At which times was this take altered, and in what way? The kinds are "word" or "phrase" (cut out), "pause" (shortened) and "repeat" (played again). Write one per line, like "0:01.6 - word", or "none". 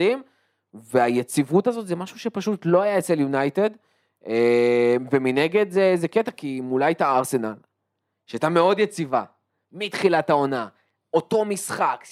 none